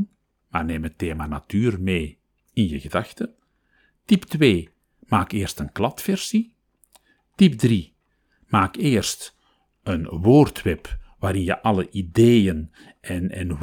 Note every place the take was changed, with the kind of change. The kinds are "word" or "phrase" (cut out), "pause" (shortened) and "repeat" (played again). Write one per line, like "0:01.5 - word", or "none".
none